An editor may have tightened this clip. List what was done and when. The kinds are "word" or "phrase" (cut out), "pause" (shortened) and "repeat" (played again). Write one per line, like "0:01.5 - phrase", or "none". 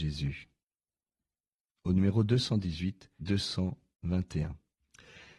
0:03.2 - word